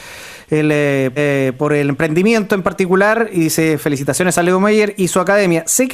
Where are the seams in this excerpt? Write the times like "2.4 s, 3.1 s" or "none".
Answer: 1.2 s